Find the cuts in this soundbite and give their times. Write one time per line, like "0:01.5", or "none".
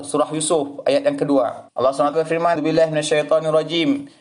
0:01.7
0:02.1
0:02.6